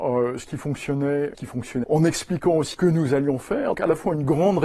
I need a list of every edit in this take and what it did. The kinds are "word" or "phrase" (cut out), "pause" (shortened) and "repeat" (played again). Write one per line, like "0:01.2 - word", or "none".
0:01.3 - word
0:01.8 - word
0:02.7 - word
0:03.7 - word